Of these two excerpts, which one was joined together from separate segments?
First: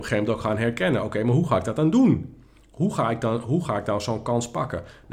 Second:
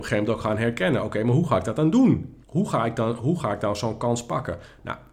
second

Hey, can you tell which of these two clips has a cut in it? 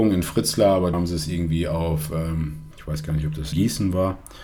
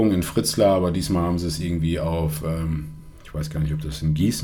first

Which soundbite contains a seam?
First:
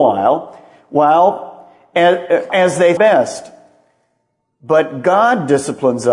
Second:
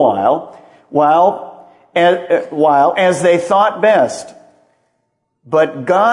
first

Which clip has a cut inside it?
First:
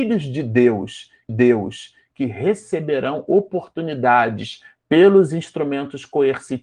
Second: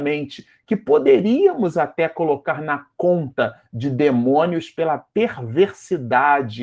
first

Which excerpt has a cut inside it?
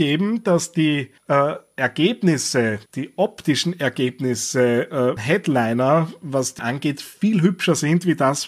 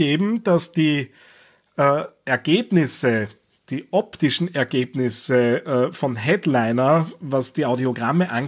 first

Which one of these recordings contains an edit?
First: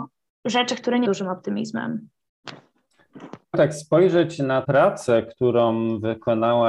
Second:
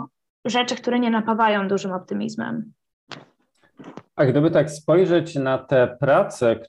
first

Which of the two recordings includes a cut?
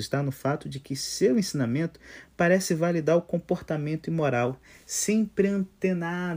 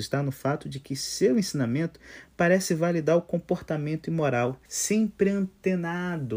second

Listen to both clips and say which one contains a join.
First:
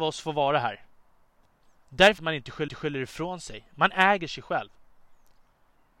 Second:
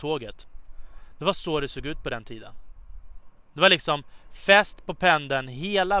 first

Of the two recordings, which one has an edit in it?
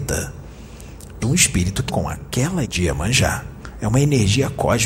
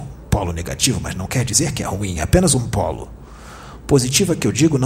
first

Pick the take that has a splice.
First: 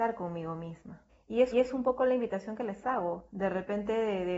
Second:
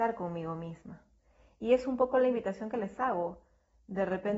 first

